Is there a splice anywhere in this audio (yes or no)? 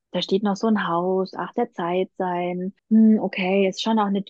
yes